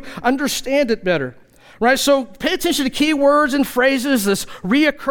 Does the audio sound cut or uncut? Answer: uncut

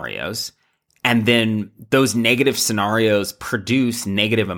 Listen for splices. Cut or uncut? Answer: uncut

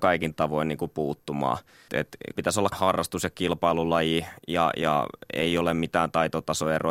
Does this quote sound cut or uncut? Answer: cut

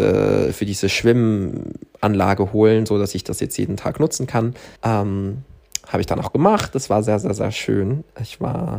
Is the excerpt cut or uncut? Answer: cut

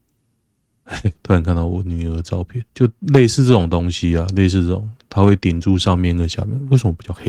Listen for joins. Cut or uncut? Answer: cut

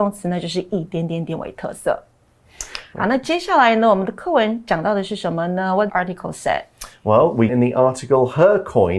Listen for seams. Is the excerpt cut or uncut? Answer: cut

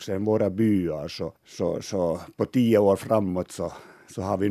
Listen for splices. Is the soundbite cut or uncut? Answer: cut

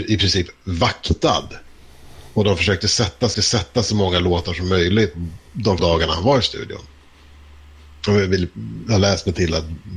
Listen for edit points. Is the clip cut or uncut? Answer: cut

